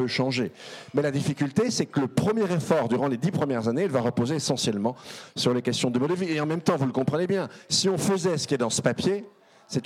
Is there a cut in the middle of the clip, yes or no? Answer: no